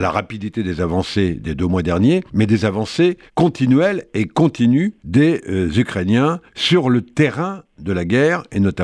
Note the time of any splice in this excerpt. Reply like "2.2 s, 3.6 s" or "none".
2.3 s, 3.3 s, 5.0 s, 6.5 s